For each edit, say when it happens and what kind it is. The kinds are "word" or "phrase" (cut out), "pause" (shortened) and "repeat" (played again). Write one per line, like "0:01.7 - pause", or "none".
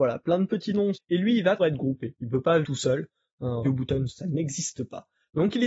0:00.9 - word
0:01.6 - word
0:02.6 - word
0:03.6 - word
0:04.1 - word